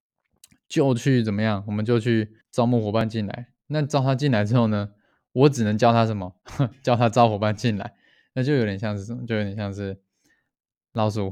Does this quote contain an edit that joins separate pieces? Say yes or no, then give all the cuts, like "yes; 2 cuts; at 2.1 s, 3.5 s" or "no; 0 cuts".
yes; 2 cuts; at 2.4 s, 6.4 s